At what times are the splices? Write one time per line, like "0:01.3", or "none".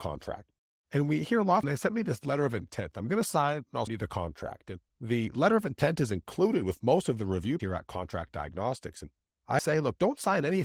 0:01.6
0:03.9
0:04.9
0:07.6
0:09.6